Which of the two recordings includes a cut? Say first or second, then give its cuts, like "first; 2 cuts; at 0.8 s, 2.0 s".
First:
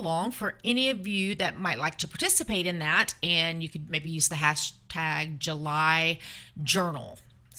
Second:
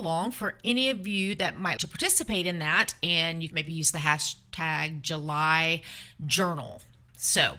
second; 2 cuts; at 1.8 s, 3.5 s